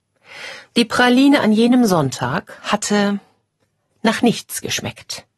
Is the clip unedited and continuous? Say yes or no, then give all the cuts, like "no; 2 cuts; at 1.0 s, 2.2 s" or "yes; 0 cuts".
yes; 0 cuts